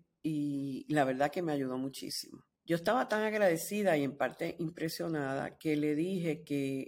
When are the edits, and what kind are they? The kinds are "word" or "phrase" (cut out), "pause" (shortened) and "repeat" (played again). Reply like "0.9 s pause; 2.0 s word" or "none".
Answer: 2.5 s pause